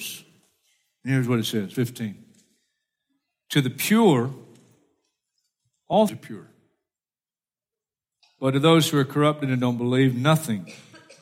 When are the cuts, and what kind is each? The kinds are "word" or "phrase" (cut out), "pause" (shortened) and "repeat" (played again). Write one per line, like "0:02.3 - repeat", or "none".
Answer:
0:01.7 - word
0:06.1 - word